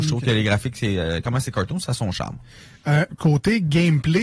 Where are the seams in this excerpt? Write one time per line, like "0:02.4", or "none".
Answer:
none